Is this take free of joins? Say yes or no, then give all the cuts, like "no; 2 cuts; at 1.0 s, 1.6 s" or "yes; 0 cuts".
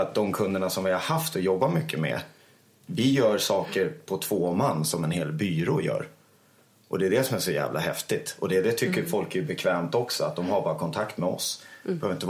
yes; 0 cuts